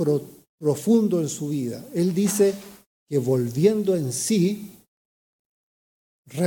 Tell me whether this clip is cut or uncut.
uncut